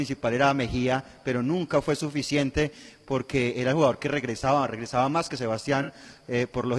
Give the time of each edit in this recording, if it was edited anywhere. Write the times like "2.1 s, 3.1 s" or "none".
none